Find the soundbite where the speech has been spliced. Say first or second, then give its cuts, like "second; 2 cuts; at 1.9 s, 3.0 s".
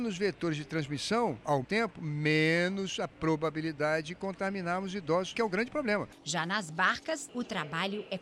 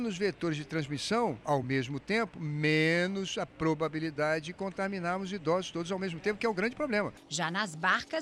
first; 2 cuts; at 1.6 s, 5.3 s